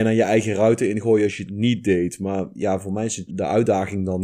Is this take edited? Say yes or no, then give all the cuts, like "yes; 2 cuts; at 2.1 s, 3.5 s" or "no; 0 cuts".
yes; 1 cut; at 3.3 s